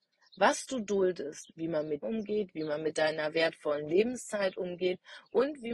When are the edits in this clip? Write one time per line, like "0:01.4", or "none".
0:02.0